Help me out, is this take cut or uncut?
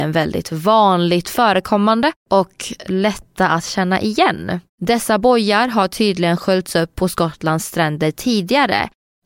cut